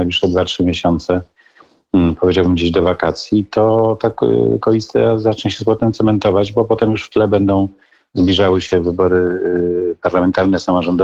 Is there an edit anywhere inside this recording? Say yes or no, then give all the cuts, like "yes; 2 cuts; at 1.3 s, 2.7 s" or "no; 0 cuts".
no; 0 cuts